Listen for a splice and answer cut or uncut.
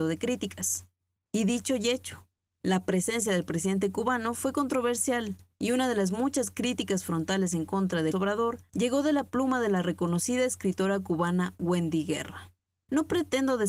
cut